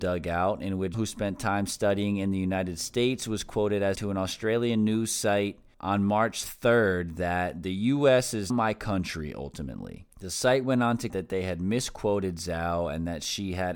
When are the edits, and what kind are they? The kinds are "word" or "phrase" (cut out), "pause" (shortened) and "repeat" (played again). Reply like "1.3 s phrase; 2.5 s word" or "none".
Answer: 0.9 s word; 3.9 s word; 5.7 s pause; 8.5 s word; 10.1 s pause; 11.1 s word